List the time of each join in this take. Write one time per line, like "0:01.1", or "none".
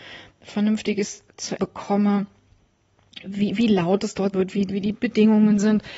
0:01.6
0:04.3
0:04.7